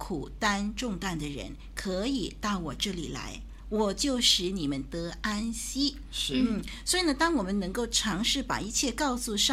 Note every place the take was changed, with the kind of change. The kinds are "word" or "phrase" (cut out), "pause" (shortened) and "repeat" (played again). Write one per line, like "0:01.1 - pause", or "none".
none